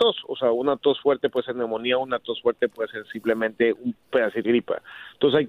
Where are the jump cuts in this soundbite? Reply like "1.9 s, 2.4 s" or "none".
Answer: 4.4 s